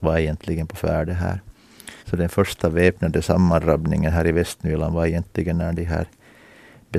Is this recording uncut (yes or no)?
no